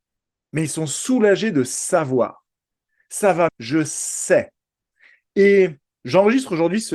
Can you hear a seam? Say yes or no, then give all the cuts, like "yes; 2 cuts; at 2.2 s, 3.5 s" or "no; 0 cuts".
yes; 2 cuts; at 3.5 s, 6.0 s